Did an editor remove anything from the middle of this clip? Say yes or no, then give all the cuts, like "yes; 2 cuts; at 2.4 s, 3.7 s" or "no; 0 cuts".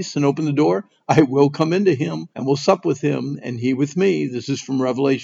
yes; 1 cut; at 2.3 s